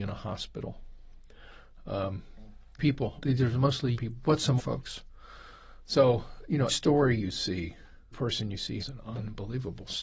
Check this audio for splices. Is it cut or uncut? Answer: cut